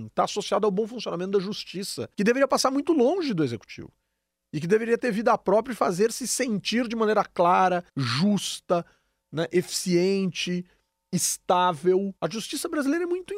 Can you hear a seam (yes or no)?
yes